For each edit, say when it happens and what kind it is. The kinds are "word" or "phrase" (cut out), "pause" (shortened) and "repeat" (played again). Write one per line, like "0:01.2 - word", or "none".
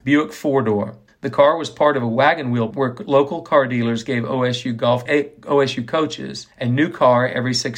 0:01.1 - pause
0:02.7 - word
0:05.1 - phrase
0:06.5 - pause